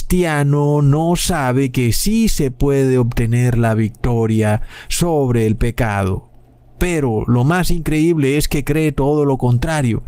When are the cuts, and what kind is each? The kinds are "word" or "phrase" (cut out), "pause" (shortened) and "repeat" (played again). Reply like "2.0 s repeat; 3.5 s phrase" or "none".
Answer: none